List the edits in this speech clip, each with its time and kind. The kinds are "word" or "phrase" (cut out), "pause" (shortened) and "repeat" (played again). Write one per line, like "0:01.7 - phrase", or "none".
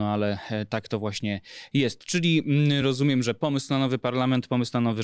none